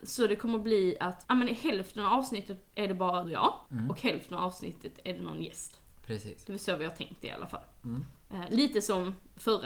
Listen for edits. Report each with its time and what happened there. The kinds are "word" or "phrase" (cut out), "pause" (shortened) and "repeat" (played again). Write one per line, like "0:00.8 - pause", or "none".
0:01.2 - word
0:03.2 - word
0:03.7 - pause